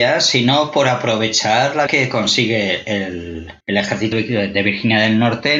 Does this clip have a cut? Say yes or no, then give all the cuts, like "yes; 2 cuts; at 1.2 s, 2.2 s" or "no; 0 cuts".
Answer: yes; 3 cuts; at 1.9 s, 3.6 s, 4.1 s